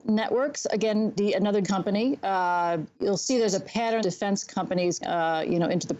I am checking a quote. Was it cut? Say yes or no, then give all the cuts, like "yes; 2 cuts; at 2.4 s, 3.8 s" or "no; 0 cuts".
yes; 5 cuts; at 1.2 s, 1.6 s, 2.9 s, 4.0 s, 5.0 s